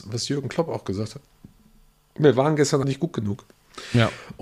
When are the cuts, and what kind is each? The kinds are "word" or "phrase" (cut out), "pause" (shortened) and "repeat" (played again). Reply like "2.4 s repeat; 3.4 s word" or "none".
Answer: 2.8 s word